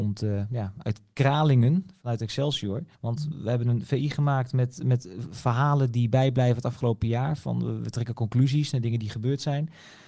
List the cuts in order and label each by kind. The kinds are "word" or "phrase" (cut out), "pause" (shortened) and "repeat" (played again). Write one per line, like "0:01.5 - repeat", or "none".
0:02.9 - pause